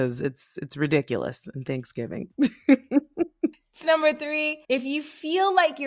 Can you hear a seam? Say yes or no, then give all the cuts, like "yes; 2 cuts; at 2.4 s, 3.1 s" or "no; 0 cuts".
yes; 2 cuts; at 3.8 s, 4.6 s